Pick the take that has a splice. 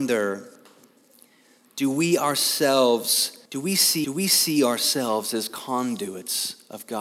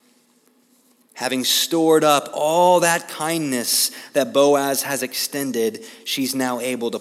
first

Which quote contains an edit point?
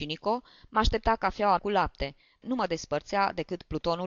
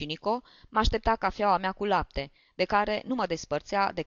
first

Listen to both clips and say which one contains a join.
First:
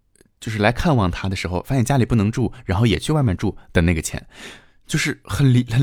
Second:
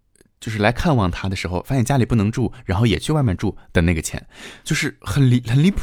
second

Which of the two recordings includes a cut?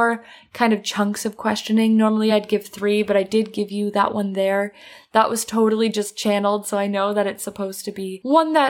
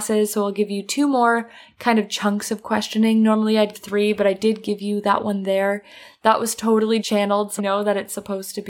second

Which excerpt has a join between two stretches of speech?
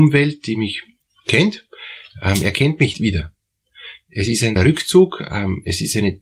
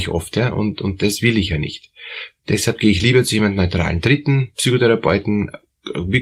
first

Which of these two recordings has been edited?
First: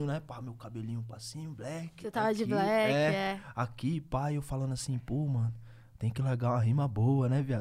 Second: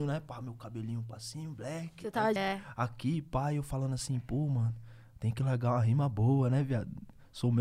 second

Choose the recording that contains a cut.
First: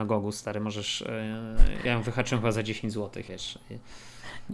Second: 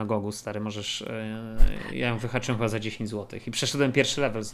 first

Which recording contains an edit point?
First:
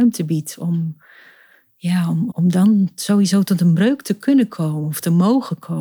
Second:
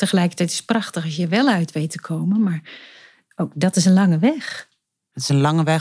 first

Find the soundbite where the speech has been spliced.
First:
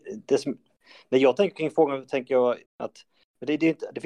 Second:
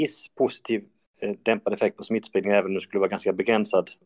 first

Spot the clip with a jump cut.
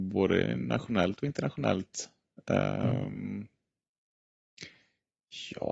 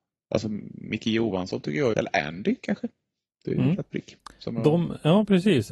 second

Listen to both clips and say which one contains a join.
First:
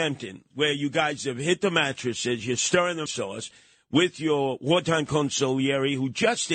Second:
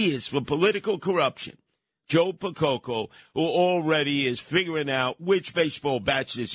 first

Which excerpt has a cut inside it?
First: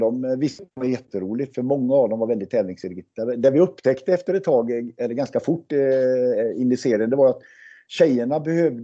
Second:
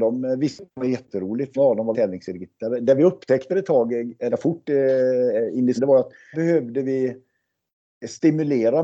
second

